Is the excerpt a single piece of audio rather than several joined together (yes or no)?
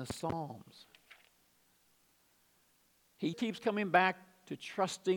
no